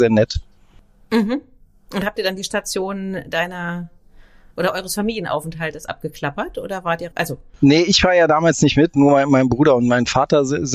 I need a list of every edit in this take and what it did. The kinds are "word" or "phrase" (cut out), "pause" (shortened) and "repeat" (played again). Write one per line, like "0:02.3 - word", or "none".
0:07.1 - word